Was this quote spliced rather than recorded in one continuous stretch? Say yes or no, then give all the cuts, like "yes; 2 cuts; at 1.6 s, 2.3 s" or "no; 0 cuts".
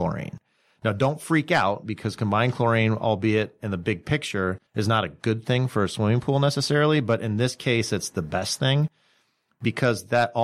yes; 1 cut; at 4.7 s